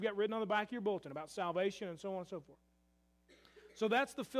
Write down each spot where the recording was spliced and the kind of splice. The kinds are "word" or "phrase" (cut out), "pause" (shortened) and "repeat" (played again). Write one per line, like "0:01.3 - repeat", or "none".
none